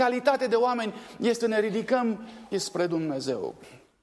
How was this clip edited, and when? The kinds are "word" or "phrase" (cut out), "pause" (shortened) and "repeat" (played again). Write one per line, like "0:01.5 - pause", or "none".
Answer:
0:01.4 - word
0:02.5 - word